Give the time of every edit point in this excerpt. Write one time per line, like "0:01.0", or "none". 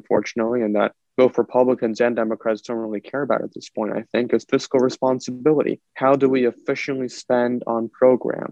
0:05.9